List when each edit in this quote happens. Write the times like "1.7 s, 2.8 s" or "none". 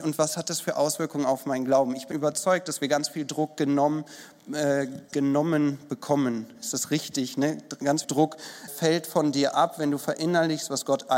2.1 s, 8.0 s, 8.7 s